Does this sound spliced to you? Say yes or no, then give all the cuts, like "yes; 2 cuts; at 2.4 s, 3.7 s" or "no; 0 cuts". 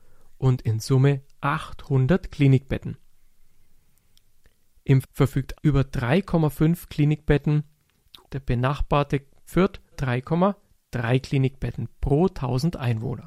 yes; 5 cuts; at 5.0 s, 5.6 s, 8.2 s, 9.5 s, 9.9 s